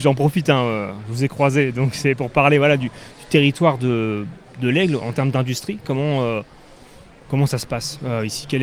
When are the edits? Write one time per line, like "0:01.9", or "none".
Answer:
none